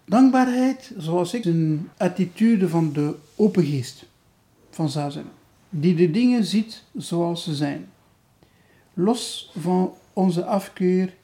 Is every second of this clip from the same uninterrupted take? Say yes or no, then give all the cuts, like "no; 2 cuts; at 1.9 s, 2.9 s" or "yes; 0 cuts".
no; 2 cuts; at 1.4 s, 1.9 s